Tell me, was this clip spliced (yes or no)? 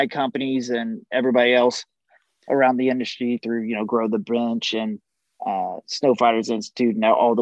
no